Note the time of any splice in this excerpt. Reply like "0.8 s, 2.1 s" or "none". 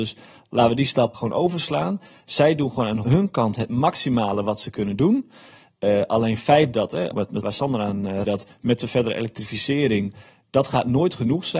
1.1 s, 3.0 s, 6.7 s, 7.1 s, 7.4 s, 8.2 s